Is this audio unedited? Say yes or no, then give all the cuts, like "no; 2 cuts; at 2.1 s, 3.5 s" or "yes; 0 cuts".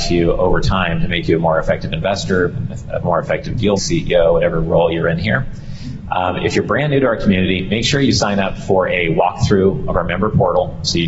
no; 1 cut; at 3.8 s